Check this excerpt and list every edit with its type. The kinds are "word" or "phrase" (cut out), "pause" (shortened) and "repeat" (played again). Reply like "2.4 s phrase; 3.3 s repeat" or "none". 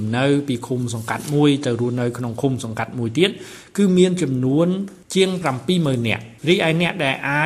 6.4 s pause